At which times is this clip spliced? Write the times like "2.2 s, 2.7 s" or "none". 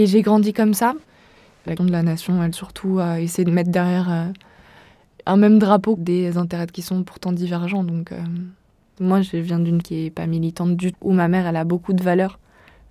1.8 s, 2.5 s, 6.0 s, 6.7 s, 9.8 s, 10.9 s